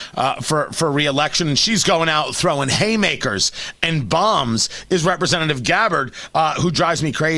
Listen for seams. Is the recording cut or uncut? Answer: uncut